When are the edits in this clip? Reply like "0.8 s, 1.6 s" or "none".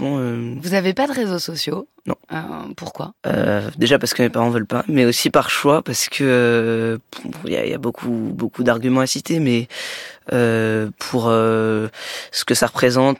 2.2 s, 3.2 s